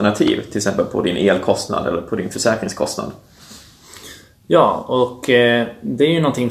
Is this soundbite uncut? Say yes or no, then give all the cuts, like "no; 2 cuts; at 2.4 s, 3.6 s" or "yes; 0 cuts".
yes; 0 cuts